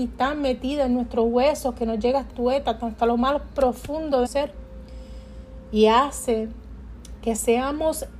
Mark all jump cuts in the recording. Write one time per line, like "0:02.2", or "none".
0:02.3
0:04.2